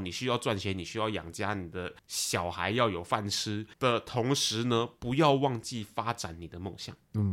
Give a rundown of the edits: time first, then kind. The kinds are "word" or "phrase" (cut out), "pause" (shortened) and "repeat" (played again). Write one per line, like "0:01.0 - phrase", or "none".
0:02.0 - pause
0:03.7 - pause